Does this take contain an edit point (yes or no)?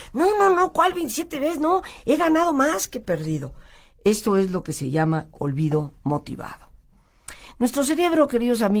no